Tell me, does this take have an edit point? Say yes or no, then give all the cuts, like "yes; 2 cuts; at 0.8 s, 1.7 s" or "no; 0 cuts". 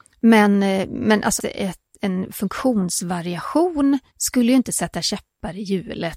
yes; 2 cuts; at 1.4 s, 4.1 s